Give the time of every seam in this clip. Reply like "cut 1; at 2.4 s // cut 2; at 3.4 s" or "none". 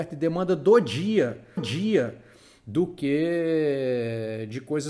cut 1; at 1.6 s

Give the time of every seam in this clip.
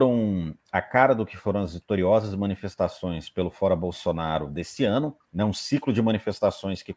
cut 1; at 5.2 s

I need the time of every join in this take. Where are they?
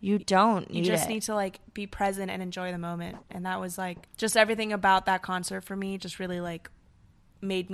cut 1; at 4.1 s

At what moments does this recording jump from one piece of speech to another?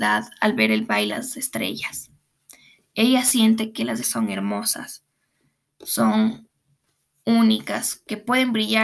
cut 1; at 1.1 s // cut 2; at 4.0 s

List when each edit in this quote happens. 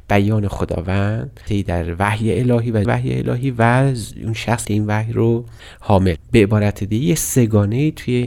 cut 1; at 1.5 s // cut 2; at 2.8 s // cut 3; at 4.6 s // cut 4; at 6.2 s

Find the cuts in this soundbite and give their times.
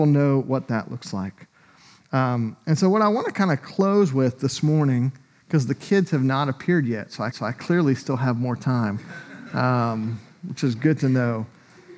cut 1; at 7.3 s

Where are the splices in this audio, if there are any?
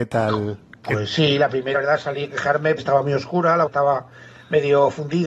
cut 1; at 1.8 s // cut 2; at 2.8 s // cut 3; at 3.7 s

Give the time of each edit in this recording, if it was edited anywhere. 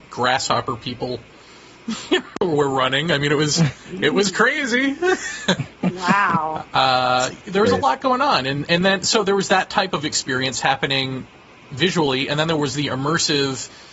none

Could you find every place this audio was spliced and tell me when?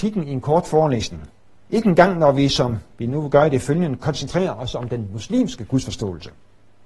none

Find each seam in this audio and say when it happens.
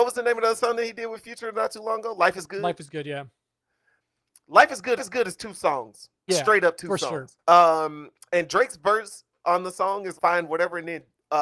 cut 1; at 5.0 s // cut 2; at 6.3 s // cut 3; at 7.4 s // cut 4; at 10.2 s

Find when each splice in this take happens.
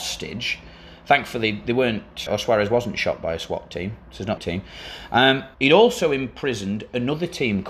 cut 1; at 2.3 s // cut 2; at 4.4 s // cut 3; at 5.5 s

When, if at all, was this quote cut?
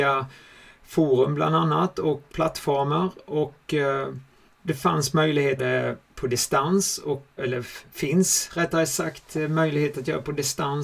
cut 1; at 2.3 s // cut 2; at 4.5 s // cut 3; at 5.6 s // cut 4; at 7.4 s

